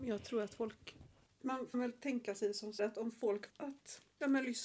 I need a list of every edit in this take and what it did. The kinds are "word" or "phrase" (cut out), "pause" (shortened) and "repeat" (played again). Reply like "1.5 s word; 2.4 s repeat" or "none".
1.7 s word; 2.8 s word; 3.5 s word